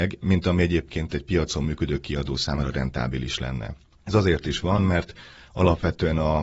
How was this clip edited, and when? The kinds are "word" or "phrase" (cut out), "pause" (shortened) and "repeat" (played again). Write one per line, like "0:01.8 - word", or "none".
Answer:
none